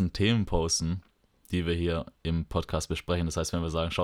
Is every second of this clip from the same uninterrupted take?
yes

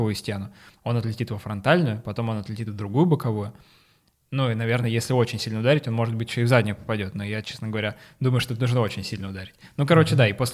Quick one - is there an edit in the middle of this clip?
no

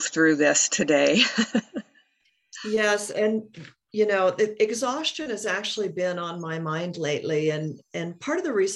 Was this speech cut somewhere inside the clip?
no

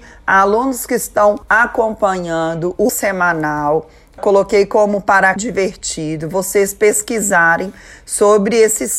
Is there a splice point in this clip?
yes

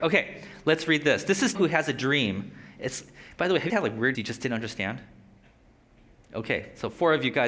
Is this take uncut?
no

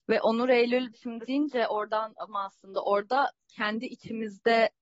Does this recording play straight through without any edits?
no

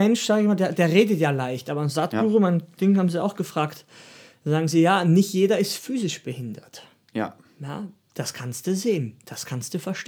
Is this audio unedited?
yes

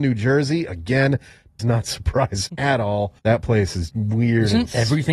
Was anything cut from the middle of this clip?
yes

